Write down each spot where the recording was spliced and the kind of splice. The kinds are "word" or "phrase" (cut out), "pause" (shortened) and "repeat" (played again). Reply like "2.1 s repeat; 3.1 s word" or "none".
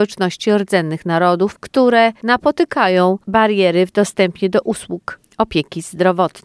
none